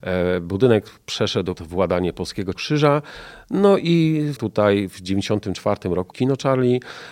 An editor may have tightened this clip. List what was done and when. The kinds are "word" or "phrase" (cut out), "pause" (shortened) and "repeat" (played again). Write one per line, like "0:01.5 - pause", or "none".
0:01.5 - word
0:02.6 - word
0:04.4 - word
0:06.1 - word